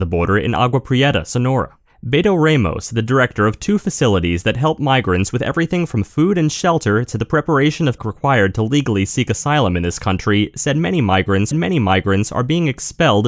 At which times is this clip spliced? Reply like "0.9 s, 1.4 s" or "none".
8.0 s, 11.5 s